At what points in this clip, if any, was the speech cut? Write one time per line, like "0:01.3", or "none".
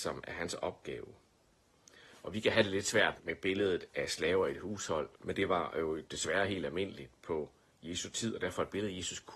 0:03.2
0:05.1